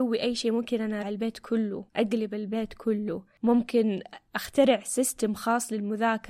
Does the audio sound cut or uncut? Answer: cut